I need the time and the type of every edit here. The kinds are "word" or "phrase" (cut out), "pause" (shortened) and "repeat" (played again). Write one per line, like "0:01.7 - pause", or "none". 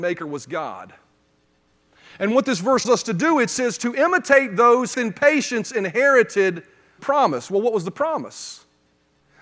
0:02.8 - word
0:04.9 - phrase
0:07.0 - word